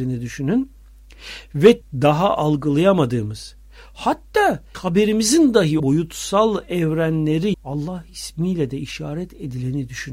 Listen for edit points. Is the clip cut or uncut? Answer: cut